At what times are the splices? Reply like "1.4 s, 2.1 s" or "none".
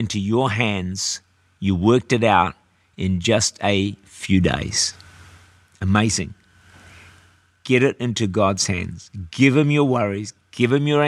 none